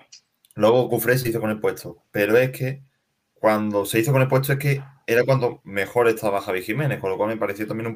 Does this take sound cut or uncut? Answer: uncut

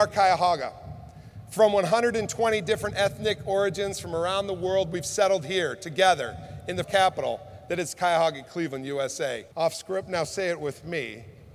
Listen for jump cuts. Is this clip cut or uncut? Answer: cut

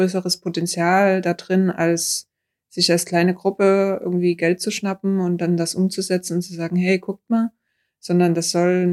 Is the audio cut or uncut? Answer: uncut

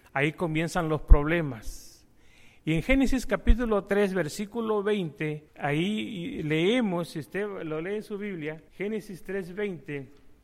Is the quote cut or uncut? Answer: cut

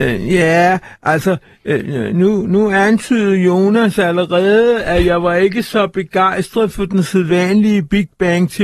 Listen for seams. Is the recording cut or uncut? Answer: uncut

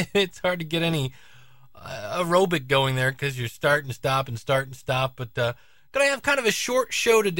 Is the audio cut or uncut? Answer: uncut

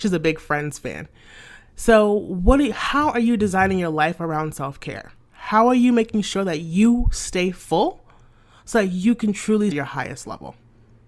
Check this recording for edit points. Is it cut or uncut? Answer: cut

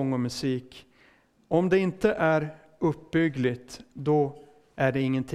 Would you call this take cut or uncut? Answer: uncut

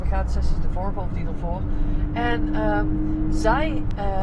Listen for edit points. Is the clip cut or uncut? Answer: uncut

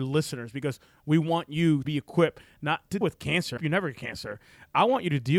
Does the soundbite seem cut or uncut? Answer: cut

